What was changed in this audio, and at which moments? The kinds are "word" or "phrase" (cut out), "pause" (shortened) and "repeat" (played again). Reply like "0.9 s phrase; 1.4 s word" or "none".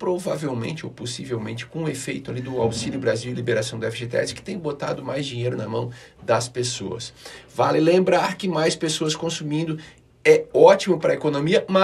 none